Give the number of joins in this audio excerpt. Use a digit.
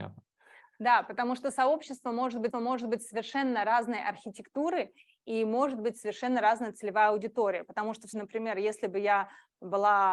2